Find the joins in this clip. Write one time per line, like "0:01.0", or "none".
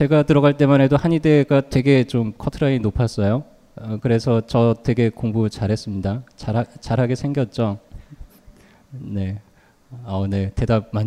none